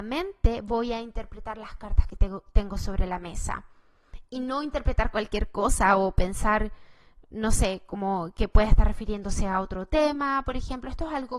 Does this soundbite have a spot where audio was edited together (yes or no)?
no